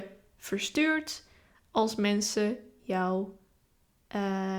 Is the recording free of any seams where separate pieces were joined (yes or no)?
yes